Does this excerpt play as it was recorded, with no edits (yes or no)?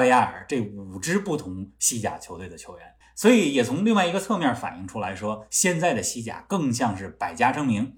yes